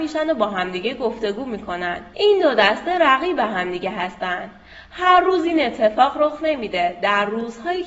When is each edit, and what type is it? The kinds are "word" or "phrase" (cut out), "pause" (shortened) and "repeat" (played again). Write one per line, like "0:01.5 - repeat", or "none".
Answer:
0:02.1 - pause